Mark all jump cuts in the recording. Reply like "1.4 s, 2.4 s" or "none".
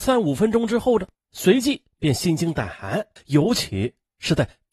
3.2 s